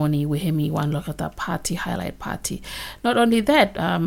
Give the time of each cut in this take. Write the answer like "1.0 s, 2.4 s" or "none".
none